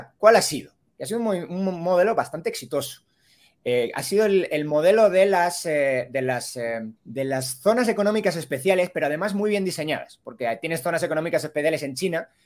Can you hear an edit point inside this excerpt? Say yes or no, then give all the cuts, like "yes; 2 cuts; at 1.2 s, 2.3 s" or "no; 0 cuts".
yes; 1 cut; at 7.0 s